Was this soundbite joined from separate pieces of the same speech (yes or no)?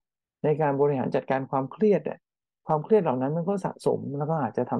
no